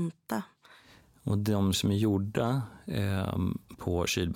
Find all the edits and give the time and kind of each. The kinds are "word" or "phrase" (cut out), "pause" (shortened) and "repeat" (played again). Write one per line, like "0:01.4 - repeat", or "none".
0:01.7 - word